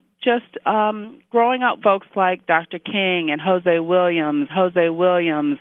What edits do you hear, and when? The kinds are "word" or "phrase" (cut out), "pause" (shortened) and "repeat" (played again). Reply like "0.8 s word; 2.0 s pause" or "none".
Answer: 1.3 s pause; 1.8 s word; 4.5 s repeat